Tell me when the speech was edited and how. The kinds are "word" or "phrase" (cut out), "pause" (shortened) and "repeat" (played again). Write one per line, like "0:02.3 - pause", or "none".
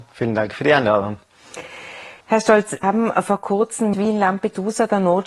0:02.2 - pause
0:02.8 - word
0:03.9 - word